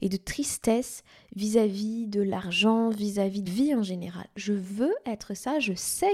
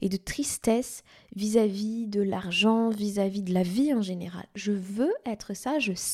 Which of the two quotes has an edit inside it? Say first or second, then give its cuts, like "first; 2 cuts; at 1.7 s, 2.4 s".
first; 1 cut; at 3.5 s